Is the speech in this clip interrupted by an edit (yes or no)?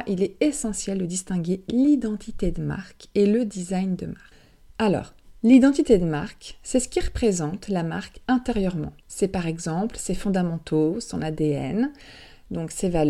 yes